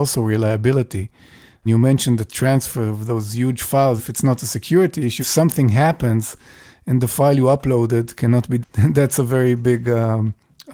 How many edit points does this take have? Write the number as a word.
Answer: four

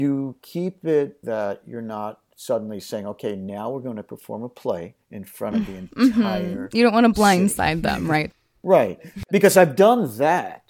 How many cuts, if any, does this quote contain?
two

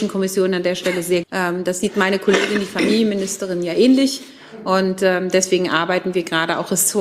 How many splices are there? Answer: one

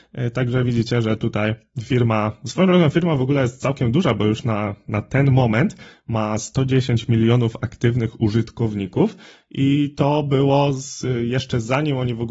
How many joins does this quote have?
zero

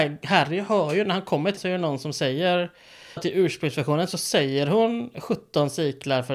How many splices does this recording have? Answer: two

